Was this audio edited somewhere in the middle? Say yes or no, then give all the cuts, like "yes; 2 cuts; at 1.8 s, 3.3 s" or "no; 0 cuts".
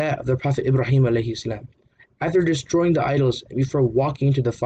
no; 0 cuts